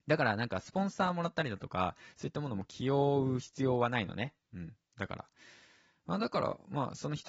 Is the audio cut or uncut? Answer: uncut